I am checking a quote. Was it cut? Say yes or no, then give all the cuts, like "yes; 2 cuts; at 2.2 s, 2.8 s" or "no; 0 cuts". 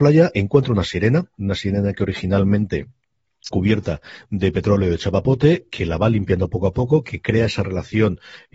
yes; 1 cut; at 3.5 s